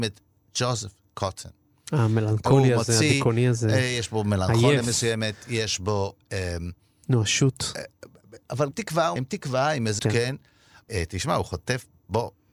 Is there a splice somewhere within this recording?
yes; 3 cuts; at 8.7 s, 9.2 s, 10.0 s

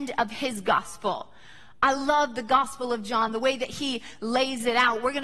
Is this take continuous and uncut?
yes; 0 cuts

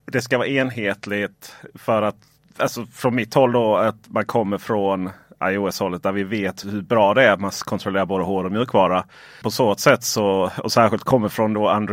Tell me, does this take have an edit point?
yes; 1 cut; at 6.6 s

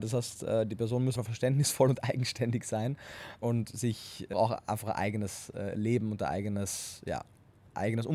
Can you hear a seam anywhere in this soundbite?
yes; 3 cuts; at 1.2 s, 3.4 s, 4.3 s

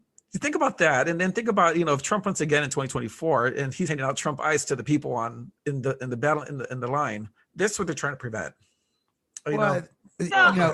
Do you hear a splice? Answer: yes; 3 cuts; at 3.9 s, 5.6 s, 7.4 s

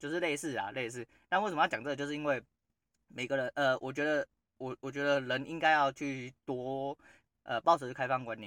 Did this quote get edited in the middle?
no; 0 cuts

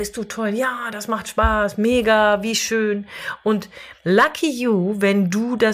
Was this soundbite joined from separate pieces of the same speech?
yes; 1 cut; at 4.0 s

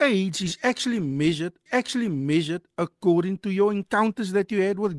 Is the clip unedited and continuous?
no; 1 cut; at 1.7 s

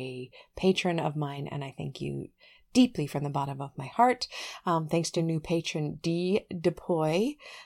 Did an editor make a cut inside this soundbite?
no; 0 cuts

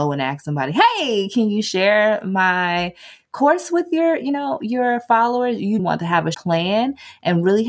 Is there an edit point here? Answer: yes; 2 cuts; at 5.8 s, 6.3 s

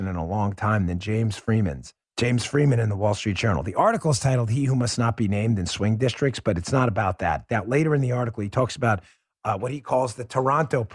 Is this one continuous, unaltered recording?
no; 1 cut; at 2.0 s

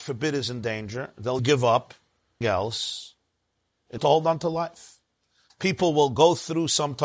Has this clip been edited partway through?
yes; 3 cuts; at 1.4 s, 2.4 s, 4.0 s

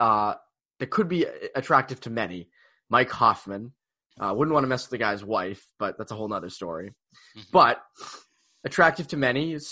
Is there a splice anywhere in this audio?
no; 0 cuts

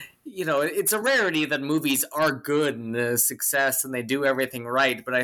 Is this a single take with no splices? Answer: yes; 0 cuts

